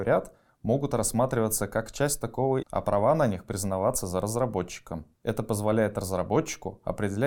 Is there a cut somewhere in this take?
yes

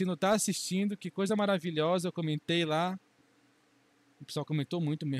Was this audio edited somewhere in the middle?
no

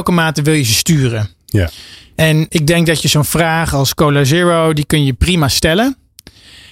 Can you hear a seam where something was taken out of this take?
yes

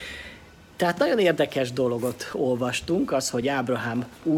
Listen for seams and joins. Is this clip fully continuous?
yes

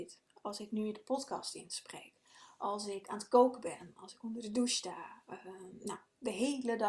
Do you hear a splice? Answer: no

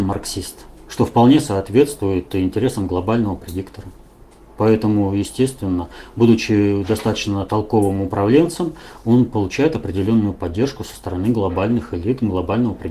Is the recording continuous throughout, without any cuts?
yes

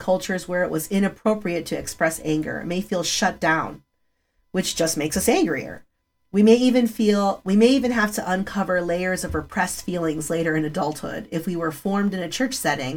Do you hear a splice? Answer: no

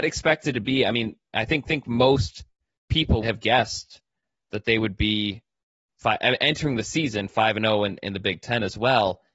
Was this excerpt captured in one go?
no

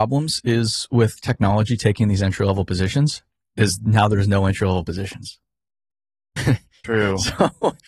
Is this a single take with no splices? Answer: no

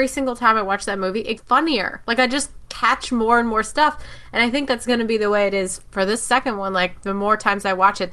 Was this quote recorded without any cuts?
no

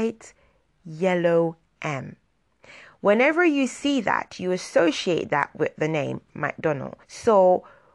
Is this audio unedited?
no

